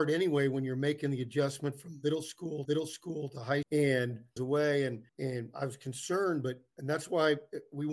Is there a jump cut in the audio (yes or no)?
yes